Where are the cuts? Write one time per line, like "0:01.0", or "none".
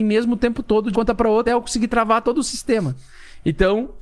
0:00.9
0:01.5